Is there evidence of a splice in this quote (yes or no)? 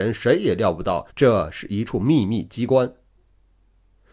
yes